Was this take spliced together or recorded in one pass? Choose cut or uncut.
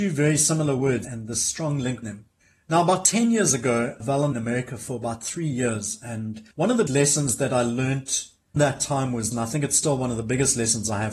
cut